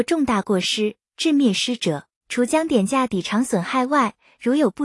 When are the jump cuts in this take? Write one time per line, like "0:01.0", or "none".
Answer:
0:02.2